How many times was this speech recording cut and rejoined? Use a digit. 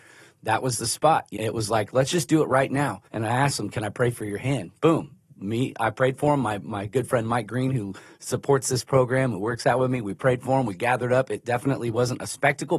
3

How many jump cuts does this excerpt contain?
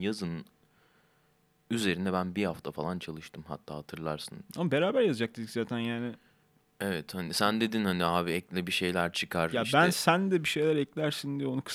0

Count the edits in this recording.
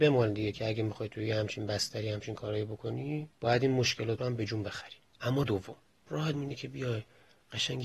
4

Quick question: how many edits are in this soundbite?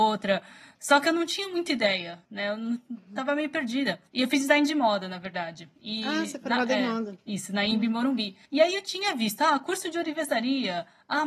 4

